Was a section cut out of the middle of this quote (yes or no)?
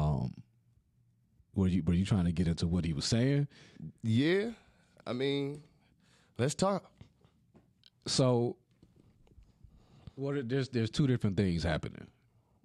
no